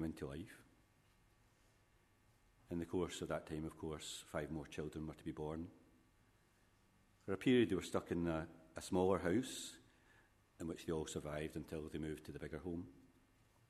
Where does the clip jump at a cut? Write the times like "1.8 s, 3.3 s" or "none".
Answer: none